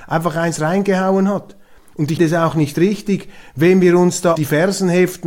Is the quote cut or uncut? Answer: cut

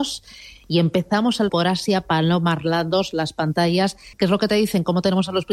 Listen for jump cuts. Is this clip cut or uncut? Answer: cut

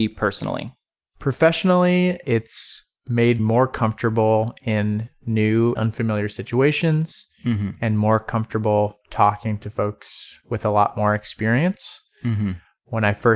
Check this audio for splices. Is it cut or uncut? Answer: cut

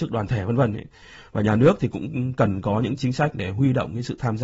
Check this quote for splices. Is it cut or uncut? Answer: uncut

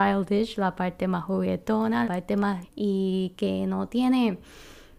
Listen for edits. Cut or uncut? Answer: cut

